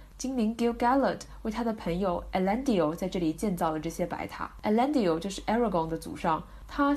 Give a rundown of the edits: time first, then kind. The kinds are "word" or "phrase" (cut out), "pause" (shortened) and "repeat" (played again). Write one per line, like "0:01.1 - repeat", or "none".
none

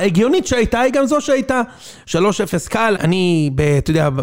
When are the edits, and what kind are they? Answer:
0:03.0 - word

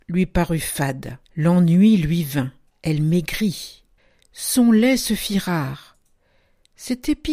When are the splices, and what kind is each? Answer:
0:01.2 - pause
0:02.7 - pause
0:04.0 - pause

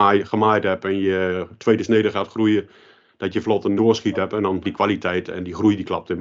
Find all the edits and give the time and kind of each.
0:03.4 - word
0:03.8 - word
0:04.6 - word

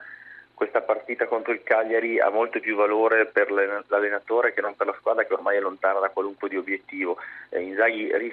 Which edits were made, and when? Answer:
0:06.4 - word

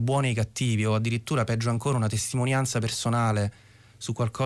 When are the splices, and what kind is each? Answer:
none

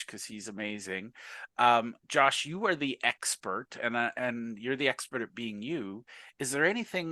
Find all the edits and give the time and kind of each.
0:02.0 - pause

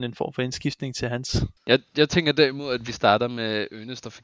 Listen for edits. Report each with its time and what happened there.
0:01.6 - pause

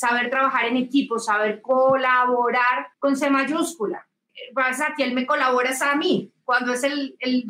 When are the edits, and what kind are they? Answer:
0:02.9 - pause

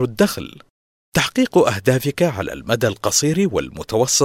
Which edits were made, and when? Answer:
none

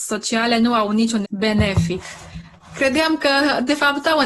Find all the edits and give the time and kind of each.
0:01.2 - word

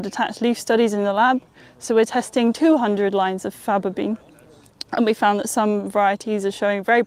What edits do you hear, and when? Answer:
none

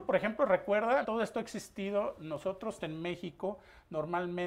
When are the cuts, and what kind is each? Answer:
0:01.0 - word
0:02.8 - word

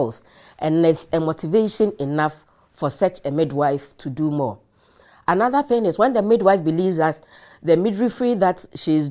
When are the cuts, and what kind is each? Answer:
none

